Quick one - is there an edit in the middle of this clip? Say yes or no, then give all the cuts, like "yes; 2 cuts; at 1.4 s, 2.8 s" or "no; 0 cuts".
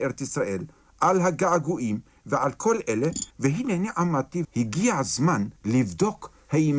yes; 3 cuts; at 3.3 s, 4.4 s, 5.6 s